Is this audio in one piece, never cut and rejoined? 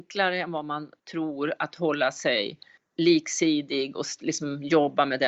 no; 2 cuts; at 1.0 s, 2.8 s

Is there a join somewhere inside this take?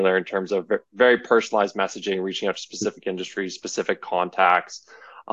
no; 0 cuts

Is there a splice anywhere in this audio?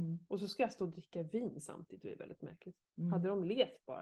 no; 0 cuts

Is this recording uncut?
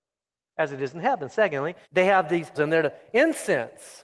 no; 2 cuts; at 1.8 s, 2.5 s

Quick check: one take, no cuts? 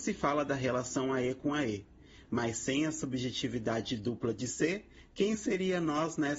yes; 0 cuts

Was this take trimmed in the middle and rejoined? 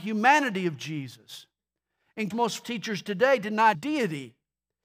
yes; 3 cuts; at 2.3 s, 2.6 s, 3.7 s

